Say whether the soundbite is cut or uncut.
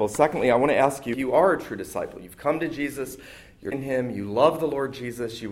cut